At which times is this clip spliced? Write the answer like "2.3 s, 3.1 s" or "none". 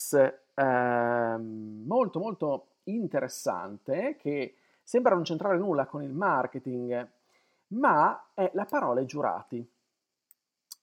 none